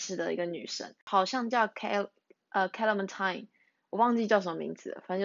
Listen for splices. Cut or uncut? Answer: uncut